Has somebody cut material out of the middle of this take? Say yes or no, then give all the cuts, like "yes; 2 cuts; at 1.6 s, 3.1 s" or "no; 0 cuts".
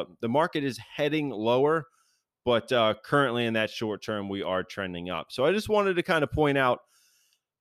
no; 0 cuts